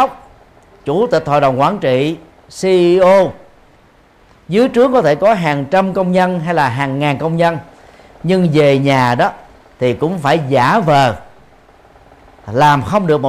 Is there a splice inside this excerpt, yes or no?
no